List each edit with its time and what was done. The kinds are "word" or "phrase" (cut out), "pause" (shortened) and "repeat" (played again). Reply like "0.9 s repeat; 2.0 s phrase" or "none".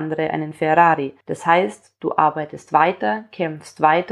1.2 s pause

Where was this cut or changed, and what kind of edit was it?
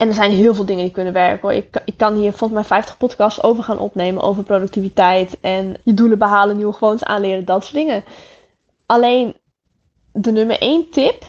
5.8 s word

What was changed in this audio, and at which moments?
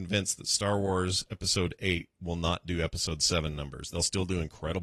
none

